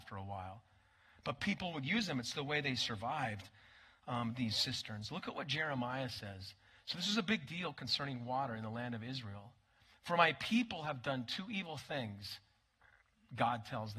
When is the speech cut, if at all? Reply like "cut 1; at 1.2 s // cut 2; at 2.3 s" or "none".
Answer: none